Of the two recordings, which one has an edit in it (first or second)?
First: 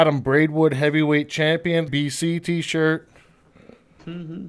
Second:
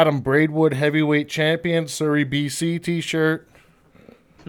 first